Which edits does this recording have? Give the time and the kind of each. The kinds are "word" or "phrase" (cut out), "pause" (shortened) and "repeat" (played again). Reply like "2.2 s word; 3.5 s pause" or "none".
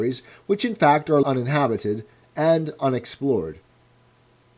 1.2 s word